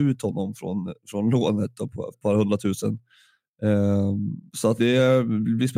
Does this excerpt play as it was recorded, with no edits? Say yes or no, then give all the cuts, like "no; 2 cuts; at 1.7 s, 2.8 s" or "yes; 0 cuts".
no; 3 cuts; at 2.1 s, 4.5 s, 4.8 s